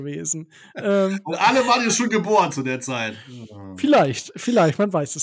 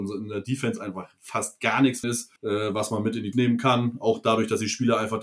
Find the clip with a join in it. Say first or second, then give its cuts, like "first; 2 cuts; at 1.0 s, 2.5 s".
second; 3 cuts; at 2.0 s, 2.4 s, 3.3 s